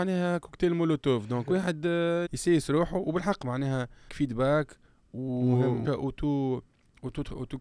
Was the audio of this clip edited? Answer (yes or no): yes